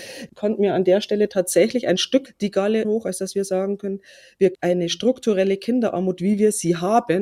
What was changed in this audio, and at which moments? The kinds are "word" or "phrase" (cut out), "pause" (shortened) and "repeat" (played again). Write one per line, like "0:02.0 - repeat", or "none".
0:02.3 - word
0:02.8 - word
0:04.5 - phrase